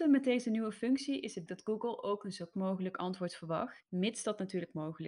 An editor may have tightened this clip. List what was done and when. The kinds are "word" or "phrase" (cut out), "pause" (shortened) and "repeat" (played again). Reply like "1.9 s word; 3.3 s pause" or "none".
1.5 s word; 2.5 s word